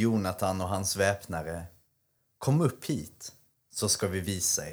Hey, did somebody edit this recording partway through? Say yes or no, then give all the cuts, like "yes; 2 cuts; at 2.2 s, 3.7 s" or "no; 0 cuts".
no; 0 cuts